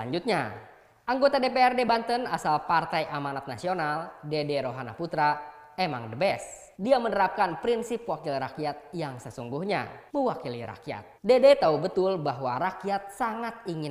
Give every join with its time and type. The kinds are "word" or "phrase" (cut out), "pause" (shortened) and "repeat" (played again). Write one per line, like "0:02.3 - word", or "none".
0:06.7 - pause
0:10.1 - pause
0:11.2 - pause